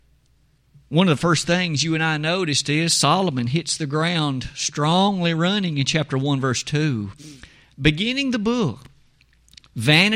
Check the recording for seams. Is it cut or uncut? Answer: uncut